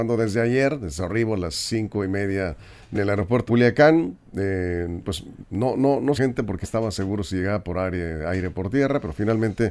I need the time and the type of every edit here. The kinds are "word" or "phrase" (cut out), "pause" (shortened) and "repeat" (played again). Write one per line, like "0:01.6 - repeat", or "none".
0:02.9 - phrase
0:03.5 - word
0:05.0 - word
0:05.4 - word
0:06.1 - phrase
0:06.6 - word